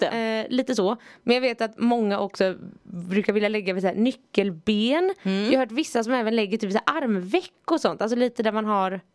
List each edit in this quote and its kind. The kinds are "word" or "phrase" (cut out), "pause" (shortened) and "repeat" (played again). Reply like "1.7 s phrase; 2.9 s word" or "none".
none